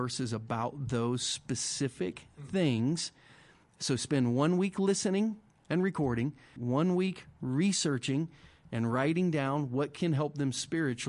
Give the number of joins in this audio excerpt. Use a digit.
1